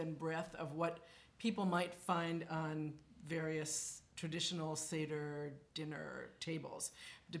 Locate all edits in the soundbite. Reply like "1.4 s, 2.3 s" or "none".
5.7 s